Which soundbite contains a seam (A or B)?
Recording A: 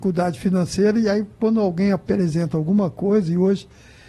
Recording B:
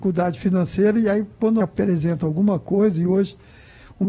B